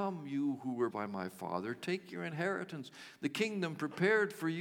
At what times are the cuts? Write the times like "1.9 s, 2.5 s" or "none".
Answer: 0.9 s